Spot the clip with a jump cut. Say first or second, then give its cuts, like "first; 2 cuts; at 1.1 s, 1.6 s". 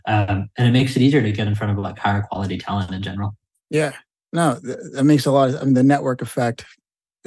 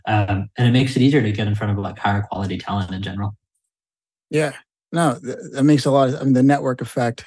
first; 1 cut; at 3.6 s